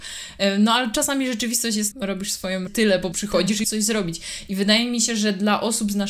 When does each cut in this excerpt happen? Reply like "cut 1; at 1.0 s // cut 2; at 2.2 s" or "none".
cut 1; at 1.9 s // cut 2; at 2.7 s // cut 3; at 3.1 s // cut 4; at 3.6 s